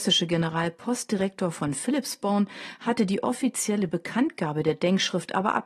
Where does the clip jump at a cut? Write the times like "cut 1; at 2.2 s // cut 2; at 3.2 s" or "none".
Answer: none